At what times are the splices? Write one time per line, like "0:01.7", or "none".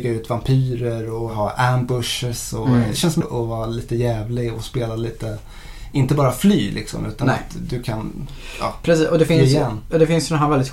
0:03.2